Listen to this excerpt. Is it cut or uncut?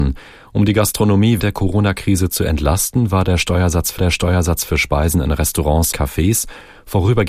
cut